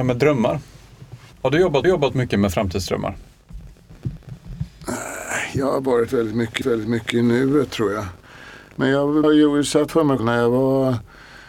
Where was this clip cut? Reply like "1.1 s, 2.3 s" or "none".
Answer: 1.3 s, 1.8 s, 6.6 s, 9.2 s, 9.9 s, 10.2 s